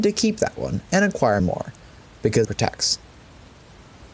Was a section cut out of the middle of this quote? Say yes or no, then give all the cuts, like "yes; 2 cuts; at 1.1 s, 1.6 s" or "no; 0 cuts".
yes; 2 cuts; at 1.4 s, 2.4 s